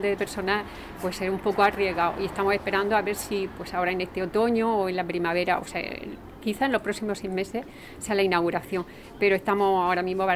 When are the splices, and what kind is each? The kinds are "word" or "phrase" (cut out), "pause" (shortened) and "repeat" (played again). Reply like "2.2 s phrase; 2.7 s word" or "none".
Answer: none